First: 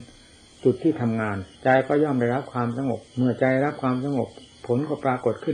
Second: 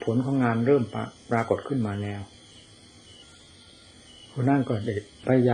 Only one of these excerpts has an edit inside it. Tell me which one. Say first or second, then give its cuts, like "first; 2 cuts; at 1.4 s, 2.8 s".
first; 2 cuts; at 1.5 s, 3.1 s